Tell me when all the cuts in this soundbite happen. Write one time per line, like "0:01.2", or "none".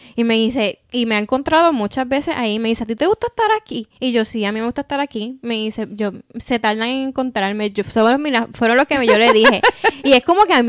0:03.9